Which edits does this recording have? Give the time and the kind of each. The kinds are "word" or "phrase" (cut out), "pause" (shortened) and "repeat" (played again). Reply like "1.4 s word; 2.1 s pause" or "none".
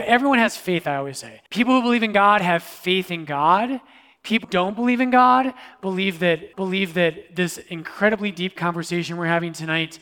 1.5 s pause; 4.4 s word; 6.5 s repeat

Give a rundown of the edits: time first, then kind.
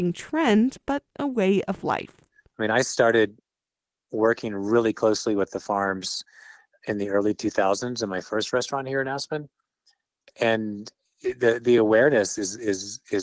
none

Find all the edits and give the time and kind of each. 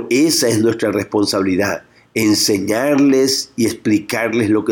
none

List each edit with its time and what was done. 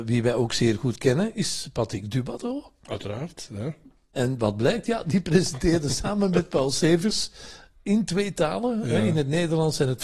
none

